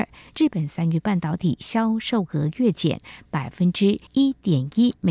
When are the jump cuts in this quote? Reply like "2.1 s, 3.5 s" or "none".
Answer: 4.1 s